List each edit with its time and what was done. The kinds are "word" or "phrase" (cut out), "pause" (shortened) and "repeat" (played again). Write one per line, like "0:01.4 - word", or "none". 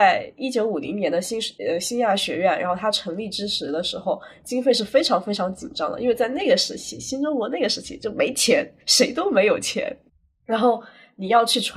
0:01.6 - pause
0:08.8 - pause
0:10.1 - pause